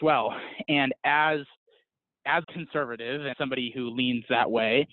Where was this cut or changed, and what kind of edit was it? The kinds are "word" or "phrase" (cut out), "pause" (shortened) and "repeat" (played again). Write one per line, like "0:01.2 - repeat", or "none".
0:02.4 - word
0:03.3 - word